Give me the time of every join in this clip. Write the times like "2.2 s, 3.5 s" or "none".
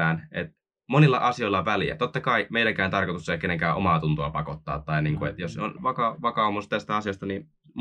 5.8 s